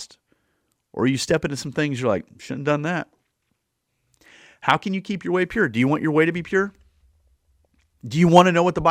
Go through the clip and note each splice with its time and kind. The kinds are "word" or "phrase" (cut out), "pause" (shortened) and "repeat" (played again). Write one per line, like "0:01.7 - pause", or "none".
none